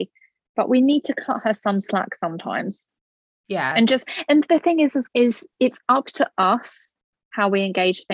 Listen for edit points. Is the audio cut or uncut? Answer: cut